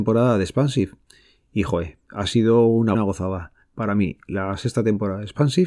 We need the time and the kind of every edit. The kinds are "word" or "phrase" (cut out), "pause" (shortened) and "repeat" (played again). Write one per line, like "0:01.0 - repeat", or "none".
0:02.9 - phrase